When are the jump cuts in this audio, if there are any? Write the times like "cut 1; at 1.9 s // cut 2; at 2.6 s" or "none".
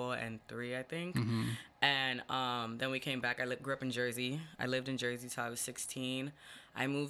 none